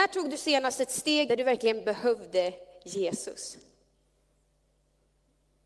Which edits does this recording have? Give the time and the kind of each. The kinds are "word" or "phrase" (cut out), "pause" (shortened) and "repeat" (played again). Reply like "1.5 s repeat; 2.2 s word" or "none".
1.3 s phrase